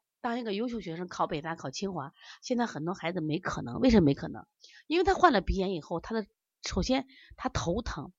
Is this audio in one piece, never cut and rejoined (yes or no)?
yes